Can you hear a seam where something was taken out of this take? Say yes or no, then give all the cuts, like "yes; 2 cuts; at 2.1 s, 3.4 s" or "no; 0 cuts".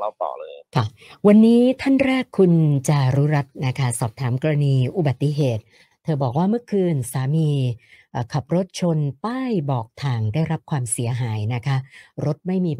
no; 0 cuts